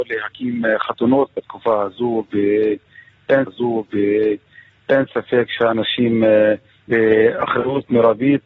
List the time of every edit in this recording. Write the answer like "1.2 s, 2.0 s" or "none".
3.5 s, 6.9 s